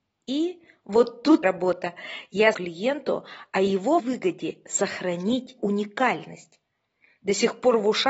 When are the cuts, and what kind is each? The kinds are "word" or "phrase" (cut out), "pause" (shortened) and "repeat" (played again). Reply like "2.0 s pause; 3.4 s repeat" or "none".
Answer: 1.4 s word; 2.5 s word; 4.0 s word; 5.6 s word